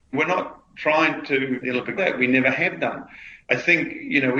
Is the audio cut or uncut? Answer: cut